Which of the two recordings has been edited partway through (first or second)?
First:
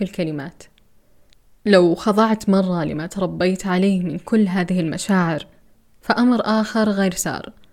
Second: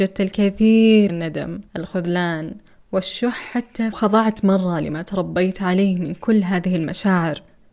second